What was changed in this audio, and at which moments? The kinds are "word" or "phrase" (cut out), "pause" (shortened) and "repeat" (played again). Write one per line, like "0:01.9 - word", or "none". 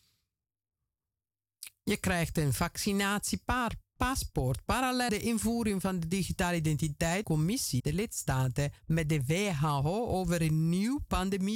0:05.1 - word
0:07.2 - phrase
0:07.8 - word
0:08.8 - pause